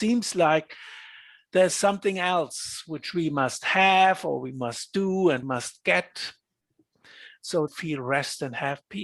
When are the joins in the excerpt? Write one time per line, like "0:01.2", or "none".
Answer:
0:01.7
0:05.4
0:07.7